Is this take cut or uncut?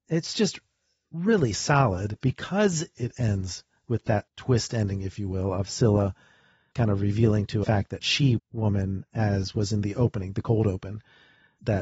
cut